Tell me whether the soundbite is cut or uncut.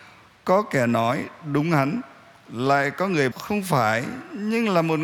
cut